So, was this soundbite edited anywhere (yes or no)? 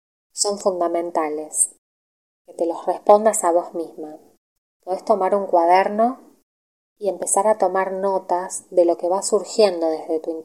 no